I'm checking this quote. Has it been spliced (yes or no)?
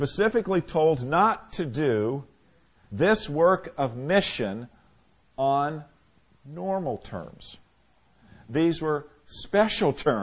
no